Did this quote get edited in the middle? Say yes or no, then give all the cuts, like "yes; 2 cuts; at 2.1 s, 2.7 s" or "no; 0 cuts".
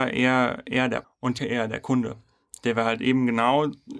yes; 2 cuts; at 1.0 s, 1.4 s